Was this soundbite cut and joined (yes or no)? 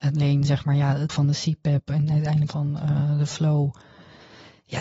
yes